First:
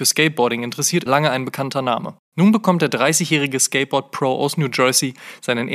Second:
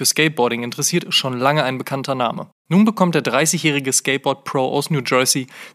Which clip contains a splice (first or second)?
first